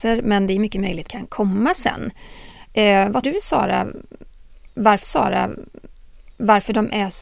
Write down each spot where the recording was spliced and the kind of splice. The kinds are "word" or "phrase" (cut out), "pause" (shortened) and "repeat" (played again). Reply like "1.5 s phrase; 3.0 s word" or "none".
1.1 s phrase; 3.2 s word; 5.0 s repeat